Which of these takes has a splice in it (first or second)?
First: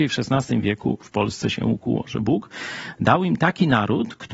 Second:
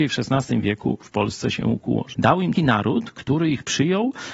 second